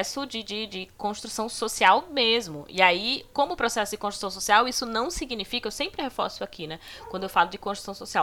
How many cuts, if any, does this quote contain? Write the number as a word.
zero